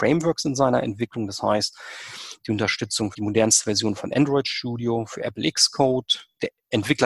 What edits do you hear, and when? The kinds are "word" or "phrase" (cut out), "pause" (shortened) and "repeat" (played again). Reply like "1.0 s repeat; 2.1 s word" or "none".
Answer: 3.1 s word